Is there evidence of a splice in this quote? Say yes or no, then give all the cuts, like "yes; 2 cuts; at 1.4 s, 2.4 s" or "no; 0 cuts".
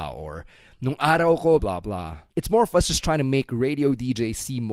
yes; 2 cuts; at 1.6 s, 2.3 s